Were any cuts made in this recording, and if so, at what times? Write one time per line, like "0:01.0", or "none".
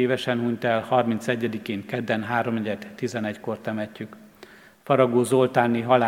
none